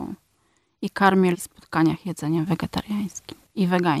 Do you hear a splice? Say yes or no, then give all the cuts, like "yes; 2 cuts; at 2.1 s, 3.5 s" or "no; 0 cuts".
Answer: yes; 1 cut; at 1.3 s